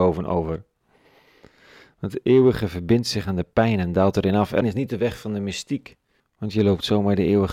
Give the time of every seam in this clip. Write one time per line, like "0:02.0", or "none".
0:04.6
0:06.2